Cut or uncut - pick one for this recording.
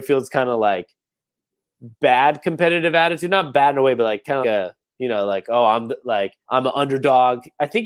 cut